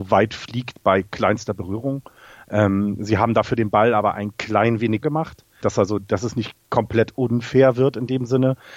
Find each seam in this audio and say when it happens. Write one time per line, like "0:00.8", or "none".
0:05.0
0:05.6

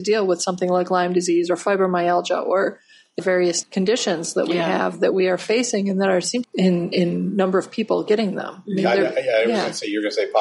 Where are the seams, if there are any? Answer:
0:03.2
0:03.6
0:06.4

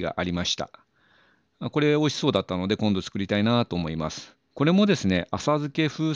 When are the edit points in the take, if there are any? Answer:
0:04.4

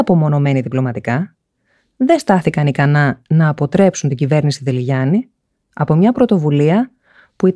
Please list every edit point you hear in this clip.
none

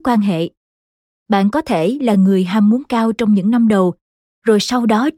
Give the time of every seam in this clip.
none

